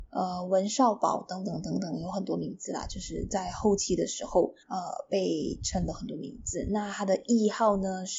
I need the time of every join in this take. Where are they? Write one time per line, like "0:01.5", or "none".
0:04.6

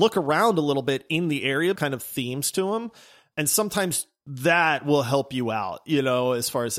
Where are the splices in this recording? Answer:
0:01.8

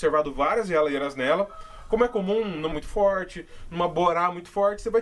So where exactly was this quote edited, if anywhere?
0:02.7

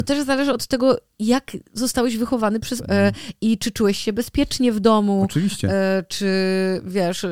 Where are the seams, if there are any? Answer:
0:02.8

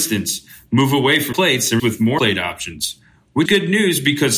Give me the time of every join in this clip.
0:01.3
0:01.8
0:02.2
0:03.5

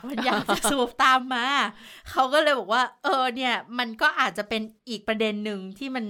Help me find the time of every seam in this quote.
0:04.8

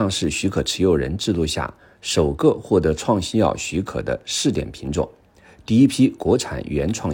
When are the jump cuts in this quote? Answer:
none

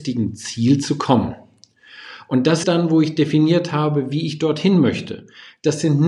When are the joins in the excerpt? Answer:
0:02.6

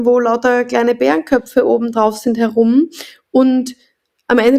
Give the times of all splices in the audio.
none

